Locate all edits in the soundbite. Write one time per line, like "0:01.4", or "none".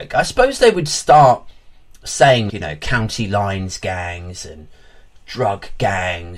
0:02.5